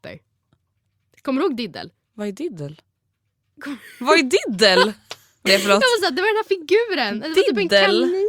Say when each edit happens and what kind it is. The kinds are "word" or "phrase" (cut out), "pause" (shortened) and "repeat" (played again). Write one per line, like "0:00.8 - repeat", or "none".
0:05.5 - word
0:06.0 - word

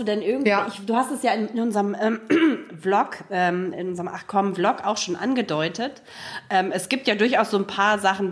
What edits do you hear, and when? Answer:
0:03.7 - word

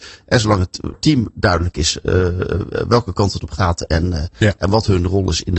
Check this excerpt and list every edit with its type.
0:00.9 - word

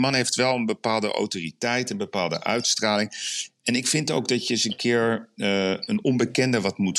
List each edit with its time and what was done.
none

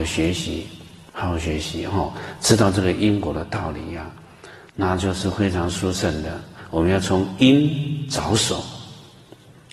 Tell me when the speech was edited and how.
0:01.1 - pause

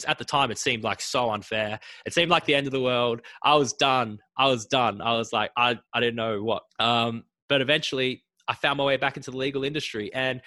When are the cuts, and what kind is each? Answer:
0:05.8 - pause
0:06.7 - pause

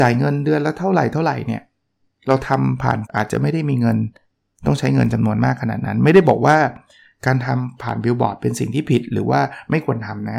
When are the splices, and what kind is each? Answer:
0:03.1 - word

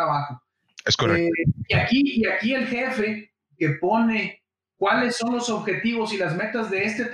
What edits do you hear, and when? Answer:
none

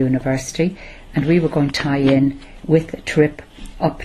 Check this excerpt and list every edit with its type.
0:01.7 - word

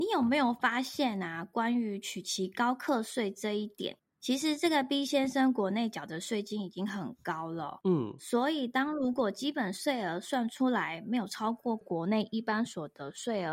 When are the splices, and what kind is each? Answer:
none

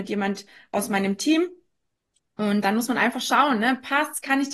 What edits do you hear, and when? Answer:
0:02.6 - word

